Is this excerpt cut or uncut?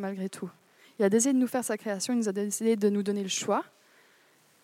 uncut